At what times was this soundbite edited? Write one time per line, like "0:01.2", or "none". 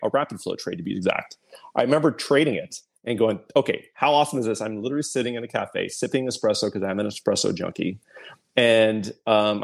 none